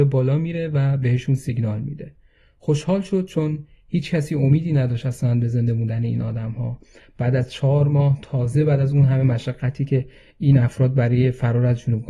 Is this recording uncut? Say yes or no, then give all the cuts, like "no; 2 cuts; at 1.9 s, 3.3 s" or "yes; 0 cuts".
yes; 0 cuts